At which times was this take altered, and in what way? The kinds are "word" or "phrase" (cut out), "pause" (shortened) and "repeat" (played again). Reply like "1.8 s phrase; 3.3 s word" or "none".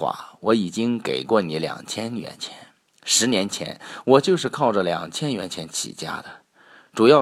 none